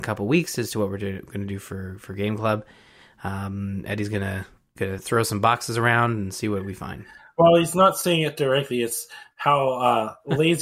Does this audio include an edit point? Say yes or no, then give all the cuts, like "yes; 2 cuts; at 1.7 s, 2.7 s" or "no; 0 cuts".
no; 0 cuts